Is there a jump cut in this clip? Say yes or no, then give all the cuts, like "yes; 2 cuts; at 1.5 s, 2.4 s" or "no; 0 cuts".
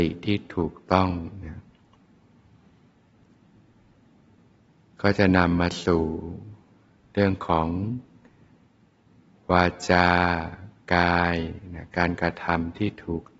no; 0 cuts